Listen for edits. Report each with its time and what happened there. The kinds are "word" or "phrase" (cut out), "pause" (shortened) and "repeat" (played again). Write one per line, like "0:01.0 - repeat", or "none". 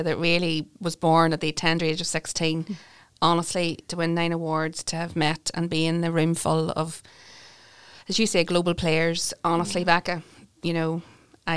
none